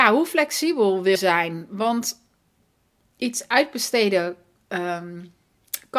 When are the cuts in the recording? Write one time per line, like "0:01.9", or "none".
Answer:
0:01.1